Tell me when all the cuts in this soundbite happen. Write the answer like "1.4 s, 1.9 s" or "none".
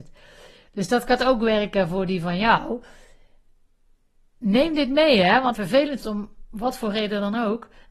5.5 s, 6.0 s